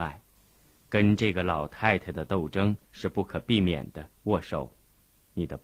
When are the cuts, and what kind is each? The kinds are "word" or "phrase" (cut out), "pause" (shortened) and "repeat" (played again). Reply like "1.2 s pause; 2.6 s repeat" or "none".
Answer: 2.8 s pause; 4.2 s pause